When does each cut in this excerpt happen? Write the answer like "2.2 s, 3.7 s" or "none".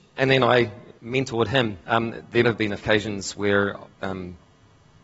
1.0 s, 1.8 s, 2.4 s, 2.8 s, 3.9 s